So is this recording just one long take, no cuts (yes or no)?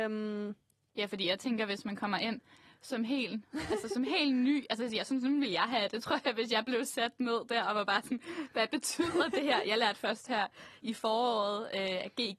yes